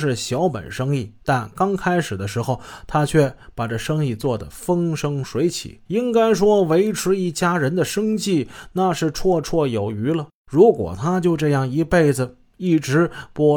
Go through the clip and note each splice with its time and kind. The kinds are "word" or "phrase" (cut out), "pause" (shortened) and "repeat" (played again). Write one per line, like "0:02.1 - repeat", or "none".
0:01.2 - pause
0:05.9 - pause
0:10.4 - pause

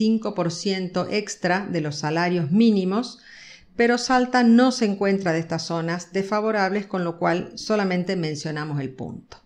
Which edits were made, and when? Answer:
none

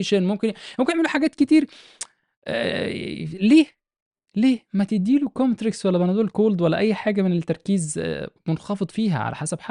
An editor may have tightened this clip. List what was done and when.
none

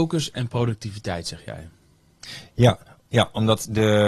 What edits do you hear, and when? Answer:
none

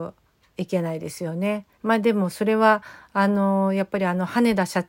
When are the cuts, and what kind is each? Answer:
0:01.7 - pause

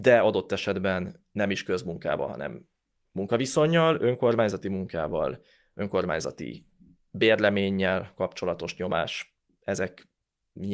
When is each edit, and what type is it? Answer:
none

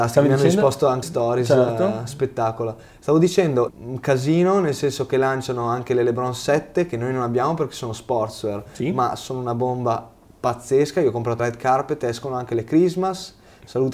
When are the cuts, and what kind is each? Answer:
0:01.0 - word
0:03.7 - word
0:11.4 - word

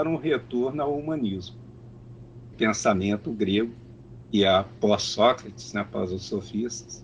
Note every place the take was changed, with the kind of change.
0:02.5 - word

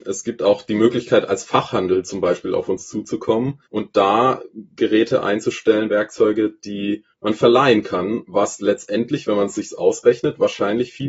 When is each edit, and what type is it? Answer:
0:03.7 - pause
0:07.1 - pause

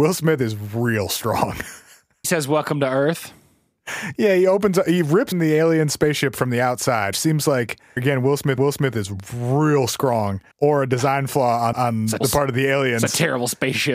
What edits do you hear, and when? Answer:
0:02.2 - phrase
0:05.3 - word
0:07.1 - word
0:08.0 - word
0:08.6 - repeat
0:10.5 - pause
0:11.7 - word
0:12.2 - word

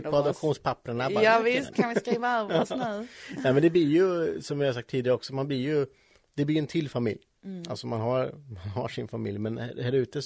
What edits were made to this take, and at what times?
0:01.7 - word

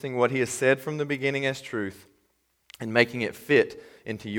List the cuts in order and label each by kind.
none

